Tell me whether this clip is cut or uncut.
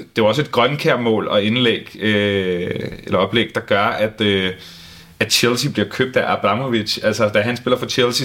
uncut